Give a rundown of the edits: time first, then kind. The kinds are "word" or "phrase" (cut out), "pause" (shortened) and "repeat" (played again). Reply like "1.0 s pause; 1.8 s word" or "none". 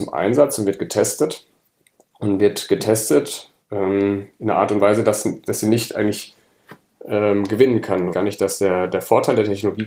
3.6 s pause; 8.1 s phrase